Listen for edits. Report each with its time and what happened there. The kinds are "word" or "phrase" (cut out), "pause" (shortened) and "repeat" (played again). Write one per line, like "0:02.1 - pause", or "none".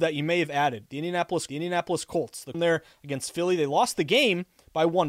0:01.5 - repeat
0:02.5 - phrase